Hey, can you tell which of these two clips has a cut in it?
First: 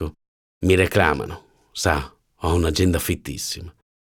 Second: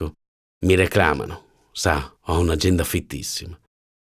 second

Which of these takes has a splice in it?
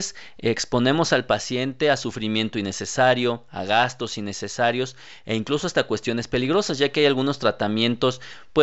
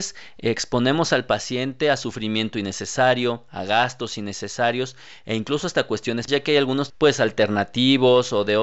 second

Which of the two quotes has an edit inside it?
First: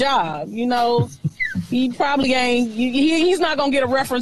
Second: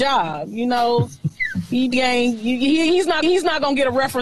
second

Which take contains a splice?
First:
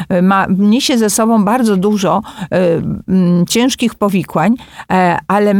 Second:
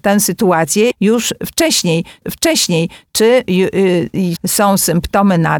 second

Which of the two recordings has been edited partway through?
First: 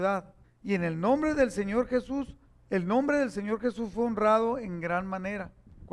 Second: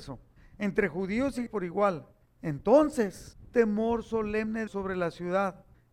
second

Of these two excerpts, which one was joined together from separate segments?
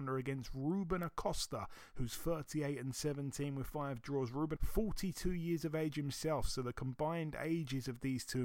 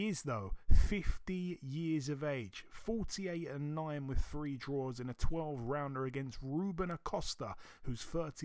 first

